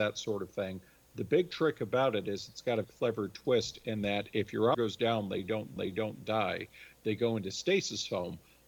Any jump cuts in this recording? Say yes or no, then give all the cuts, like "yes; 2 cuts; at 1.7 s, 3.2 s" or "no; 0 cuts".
yes; 3 cuts; at 2.8 s, 4.7 s, 5.8 s